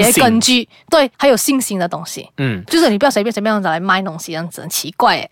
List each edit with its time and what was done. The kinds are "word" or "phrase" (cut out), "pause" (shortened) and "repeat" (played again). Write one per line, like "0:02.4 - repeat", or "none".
0:01.1 - pause